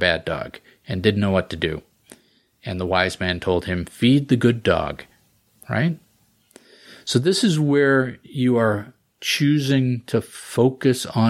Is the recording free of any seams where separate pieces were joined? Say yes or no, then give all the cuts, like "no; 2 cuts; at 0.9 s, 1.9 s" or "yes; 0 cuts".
yes; 0 cuts